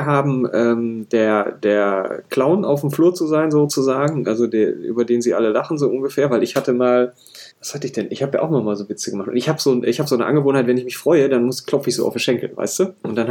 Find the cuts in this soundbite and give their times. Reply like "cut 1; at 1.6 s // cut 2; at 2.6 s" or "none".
cut 1; at 7.5 s